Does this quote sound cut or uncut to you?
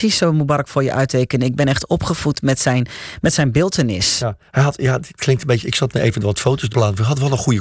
cut